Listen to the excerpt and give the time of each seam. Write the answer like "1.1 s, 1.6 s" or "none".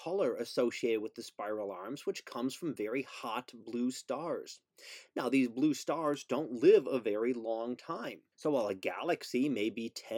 8.3 s